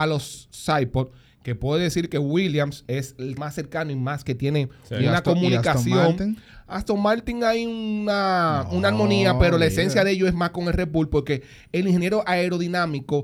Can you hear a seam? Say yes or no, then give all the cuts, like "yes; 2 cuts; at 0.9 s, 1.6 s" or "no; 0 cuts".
yes; 1 cut; at 3.4 s